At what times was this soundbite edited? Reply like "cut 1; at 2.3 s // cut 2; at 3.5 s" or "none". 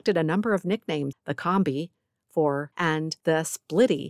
cut 1; at 1.1 s // cut 2; at 2.7 s